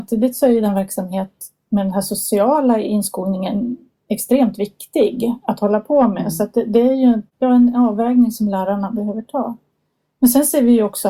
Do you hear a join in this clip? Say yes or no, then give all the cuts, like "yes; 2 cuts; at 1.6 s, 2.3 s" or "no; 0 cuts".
no; 0 cuts